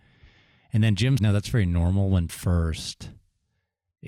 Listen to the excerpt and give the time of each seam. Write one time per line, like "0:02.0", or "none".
0:01.2
0:02.3